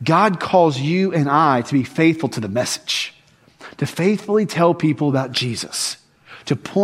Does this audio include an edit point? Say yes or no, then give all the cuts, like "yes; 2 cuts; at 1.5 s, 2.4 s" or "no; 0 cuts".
no; 0 cuts